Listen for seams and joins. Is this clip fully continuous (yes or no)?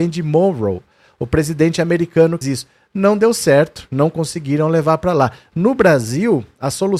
no